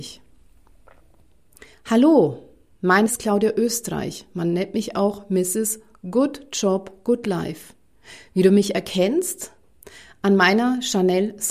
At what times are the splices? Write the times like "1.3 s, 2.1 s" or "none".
3.1 s